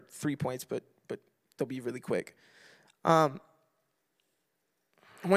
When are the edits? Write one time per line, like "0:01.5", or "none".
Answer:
none

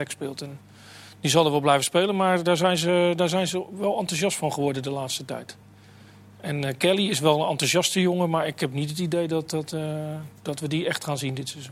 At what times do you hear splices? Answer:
none

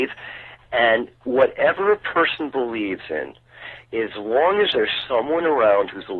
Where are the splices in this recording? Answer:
0:03.8

